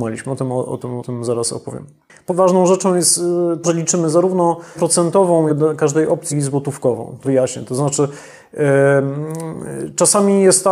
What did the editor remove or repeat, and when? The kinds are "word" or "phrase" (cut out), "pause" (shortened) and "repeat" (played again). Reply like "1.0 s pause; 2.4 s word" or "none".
1.0 s word; 2.3 s word; 3.6 s word; 4.7 s word; 5.5 s word; 6.3 s word; 7.2 s word